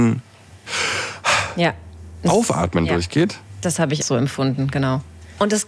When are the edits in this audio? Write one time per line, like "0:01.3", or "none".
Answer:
0:04.0

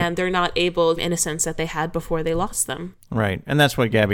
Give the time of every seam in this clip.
0:01.0

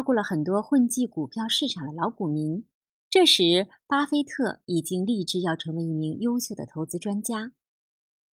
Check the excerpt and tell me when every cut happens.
0:02.8

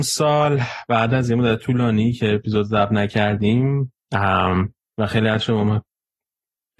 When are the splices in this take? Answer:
0:04.8

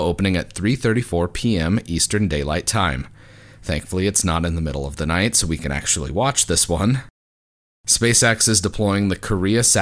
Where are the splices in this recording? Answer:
none

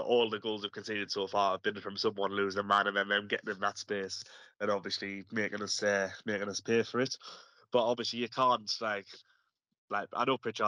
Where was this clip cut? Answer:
none

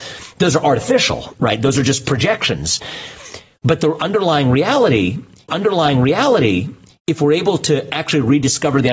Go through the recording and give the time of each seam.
0:05.5

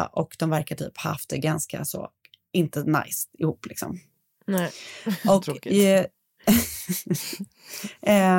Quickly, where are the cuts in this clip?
none

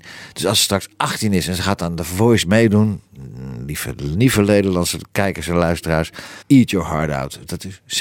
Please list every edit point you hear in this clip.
0:06.4

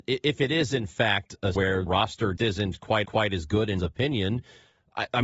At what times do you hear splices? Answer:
0:01.5
0:01.9
0:02.4
0:03.0
0:03.8

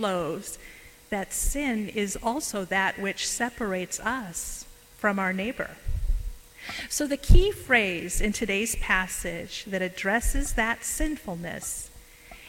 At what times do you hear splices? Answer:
none

